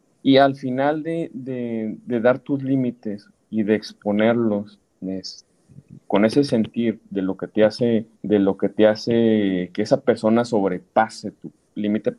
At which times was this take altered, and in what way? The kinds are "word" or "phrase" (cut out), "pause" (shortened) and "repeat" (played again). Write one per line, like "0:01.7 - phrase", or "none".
0:06.0 - pause
0:08.1 - pause